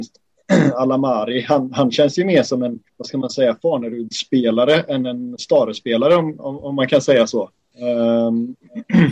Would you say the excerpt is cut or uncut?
cut